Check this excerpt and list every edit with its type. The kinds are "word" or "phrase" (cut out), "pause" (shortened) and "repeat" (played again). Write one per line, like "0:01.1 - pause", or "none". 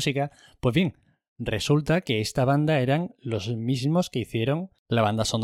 none